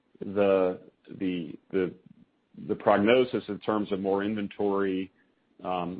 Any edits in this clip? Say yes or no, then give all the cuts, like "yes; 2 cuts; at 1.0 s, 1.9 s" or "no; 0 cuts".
no; 0 cuts